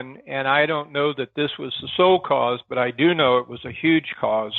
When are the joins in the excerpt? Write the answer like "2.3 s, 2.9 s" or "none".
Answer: none